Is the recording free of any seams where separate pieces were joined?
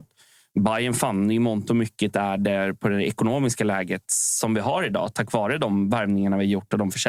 yes; 0 cuts

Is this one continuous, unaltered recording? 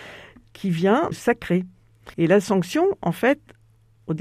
no; 2 cuts; at 1.1 s, 2.1 s

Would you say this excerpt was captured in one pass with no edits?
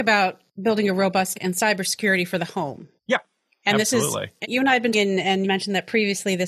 no; 5 cuts; at 1.3 s, 3.0 s, 4.4 s, 4.9 s, 5.4 s

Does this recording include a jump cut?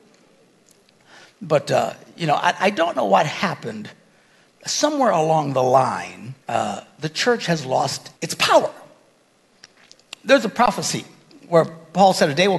yes; 2 cuts; at 6.4 s, 8.2 s

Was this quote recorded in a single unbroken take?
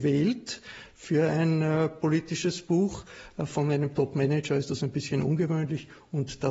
yes; 0 cuts

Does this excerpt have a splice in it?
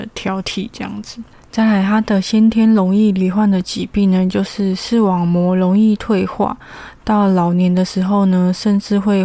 no; 0 cuts

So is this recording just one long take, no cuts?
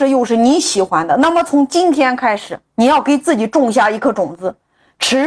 no; 1 cut; at 2.7 s

